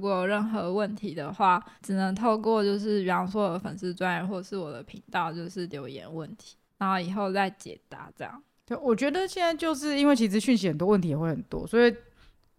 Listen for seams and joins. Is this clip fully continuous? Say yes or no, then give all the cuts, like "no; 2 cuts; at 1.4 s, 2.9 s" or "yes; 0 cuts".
no; 1 cut; at 1.8 s